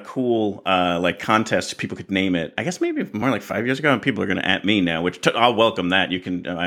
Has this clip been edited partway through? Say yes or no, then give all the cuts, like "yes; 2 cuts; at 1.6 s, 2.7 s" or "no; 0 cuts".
no; 0 cuts